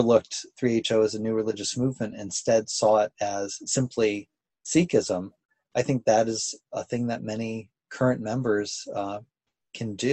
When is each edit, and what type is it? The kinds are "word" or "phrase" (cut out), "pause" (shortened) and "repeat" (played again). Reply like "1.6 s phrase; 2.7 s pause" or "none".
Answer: none